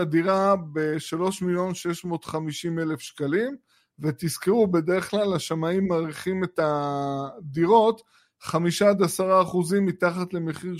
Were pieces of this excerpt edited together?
no; 0 cuts

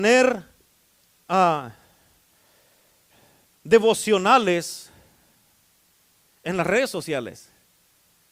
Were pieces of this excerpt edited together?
no; 0 cuts

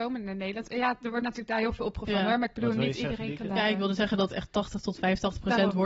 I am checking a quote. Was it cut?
no; 0 cuts

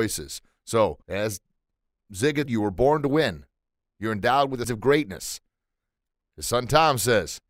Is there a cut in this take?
yes; 3 cuts; at 1.0 s, 2.5 s, 4.6 s

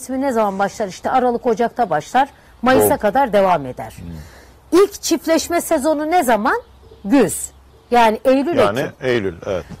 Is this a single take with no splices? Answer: yes; 0 cuts

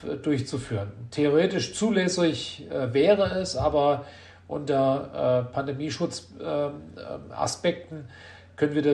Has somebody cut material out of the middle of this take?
no; 0 cuts

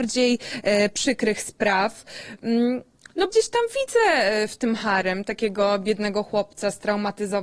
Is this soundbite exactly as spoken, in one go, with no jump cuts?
no; 1 cut; at 3.3 s

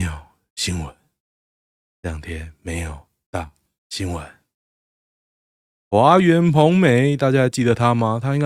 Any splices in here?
no; 0 cuts

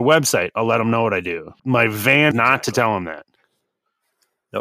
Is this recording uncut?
no; 2 cuts; at 1.6 s, 2.3 s

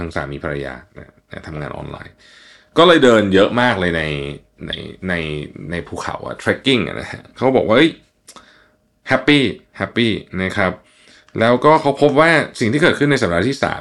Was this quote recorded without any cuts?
yes; 0 cuts

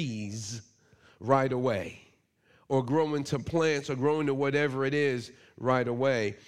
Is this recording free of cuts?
yes; 0 cuts

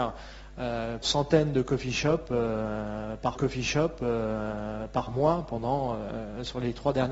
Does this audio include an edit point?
yes; 2 cuts; at 1.0 s, 3.3 s

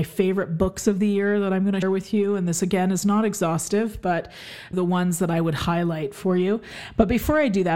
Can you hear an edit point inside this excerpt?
yes; 2 cuts; at 1.8 s, 4.7 s

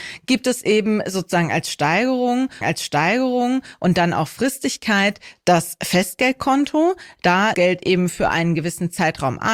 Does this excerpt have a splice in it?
yes; 2 cuts; at 2.6 s, 7.5 s

